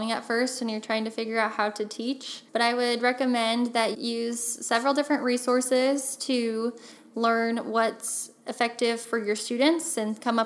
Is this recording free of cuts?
no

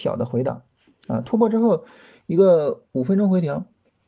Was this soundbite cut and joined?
no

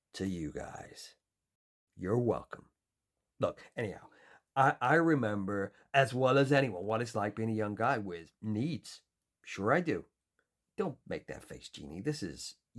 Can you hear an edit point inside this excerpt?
no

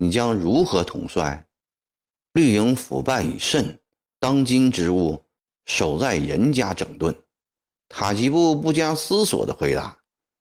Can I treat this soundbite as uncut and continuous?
yes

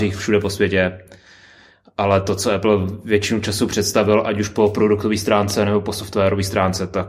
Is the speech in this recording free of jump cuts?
yes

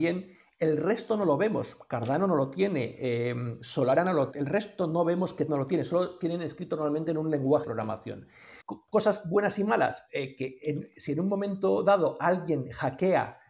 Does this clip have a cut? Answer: yes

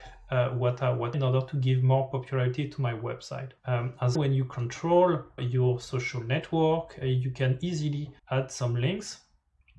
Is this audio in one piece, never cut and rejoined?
no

